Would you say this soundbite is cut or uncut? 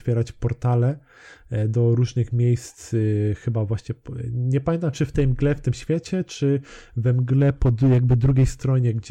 uncut